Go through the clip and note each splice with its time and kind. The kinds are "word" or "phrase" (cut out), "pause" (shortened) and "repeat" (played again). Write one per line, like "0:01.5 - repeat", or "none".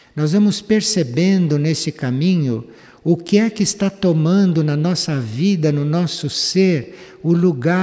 none